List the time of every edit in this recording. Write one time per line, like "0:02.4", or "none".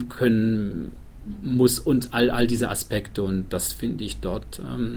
none